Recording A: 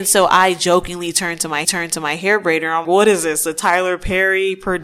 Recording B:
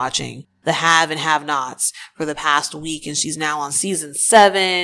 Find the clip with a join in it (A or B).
A